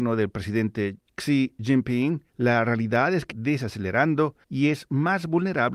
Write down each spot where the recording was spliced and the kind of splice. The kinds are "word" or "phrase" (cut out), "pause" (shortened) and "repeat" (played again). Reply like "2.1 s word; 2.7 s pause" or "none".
2.3 s pause; 3.3 s phrase; 4.4 s pause